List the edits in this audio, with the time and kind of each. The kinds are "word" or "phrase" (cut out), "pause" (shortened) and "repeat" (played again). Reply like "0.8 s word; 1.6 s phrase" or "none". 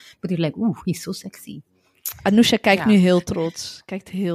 none

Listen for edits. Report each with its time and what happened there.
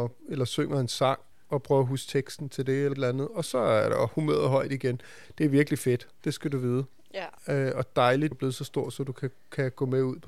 1.3 s pause; 2.9 s word; 7.4 s pause; 8.3 s word

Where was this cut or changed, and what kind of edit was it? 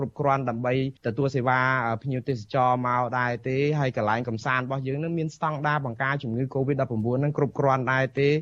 1.0 s pause

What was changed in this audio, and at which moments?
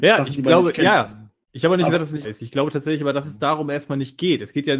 2.2 s word

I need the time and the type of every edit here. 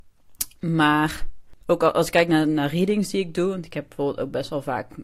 1.6 s pause

